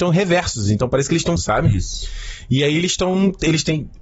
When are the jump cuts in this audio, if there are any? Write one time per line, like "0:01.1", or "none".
0:01.4